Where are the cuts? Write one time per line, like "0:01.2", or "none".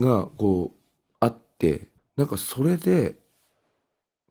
0:02.0